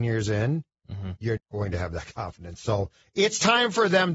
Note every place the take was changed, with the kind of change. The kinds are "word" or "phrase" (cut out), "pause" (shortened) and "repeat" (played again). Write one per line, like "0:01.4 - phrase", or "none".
0:01.4 - word
0:03.0 - word